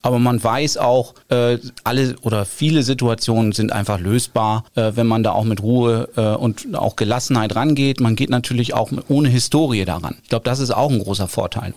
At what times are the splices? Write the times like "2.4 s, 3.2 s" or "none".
1.2 s, 4.7 s, 10.2 s